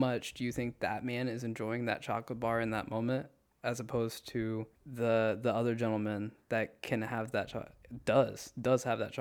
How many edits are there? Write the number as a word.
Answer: one